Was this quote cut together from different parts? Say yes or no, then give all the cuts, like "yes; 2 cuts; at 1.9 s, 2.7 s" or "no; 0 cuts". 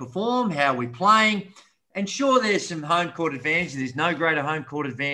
no; 0 cuts